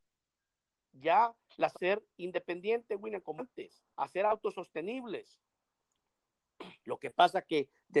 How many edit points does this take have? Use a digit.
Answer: 4